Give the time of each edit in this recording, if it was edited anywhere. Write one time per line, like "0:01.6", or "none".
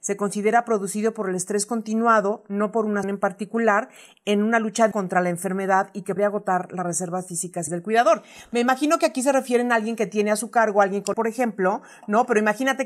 0:03.0
0:04.9
0:06.2
0:07.7
0:11.1

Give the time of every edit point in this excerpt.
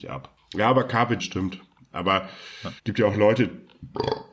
0:01.2
0:02.8

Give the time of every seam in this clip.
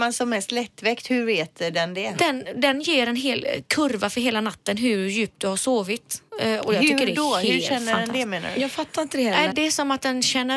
0:06.3
0:09.5

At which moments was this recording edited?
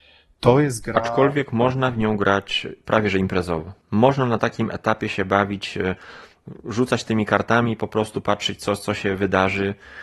0:03.8

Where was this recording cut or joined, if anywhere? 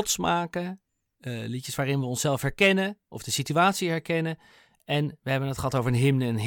none

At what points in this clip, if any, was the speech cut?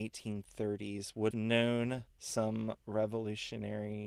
0:01.3
0:02.1

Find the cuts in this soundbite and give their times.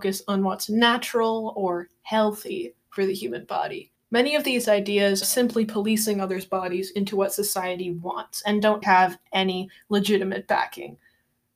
0:04.0
0:05.2
0:08.8

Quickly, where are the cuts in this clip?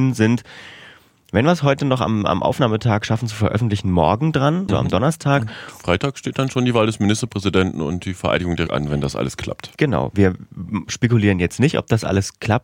0:04.7
0:08.7

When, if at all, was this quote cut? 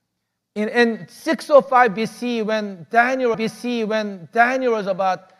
0:03.3

